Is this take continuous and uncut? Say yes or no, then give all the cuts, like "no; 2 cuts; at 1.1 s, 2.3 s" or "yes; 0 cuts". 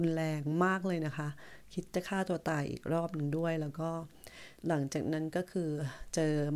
no; 1 cut; at 4.6 s